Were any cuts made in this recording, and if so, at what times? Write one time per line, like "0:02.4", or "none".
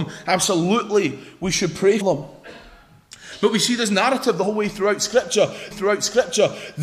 0:02.0
0:05.7

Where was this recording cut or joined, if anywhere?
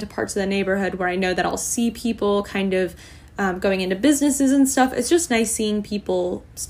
none

